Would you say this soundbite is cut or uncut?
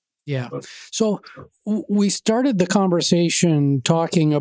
uncut